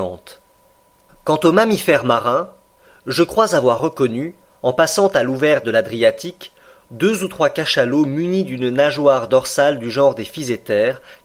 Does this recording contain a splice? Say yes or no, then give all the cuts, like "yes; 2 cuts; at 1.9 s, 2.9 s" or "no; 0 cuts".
no; 0 cuts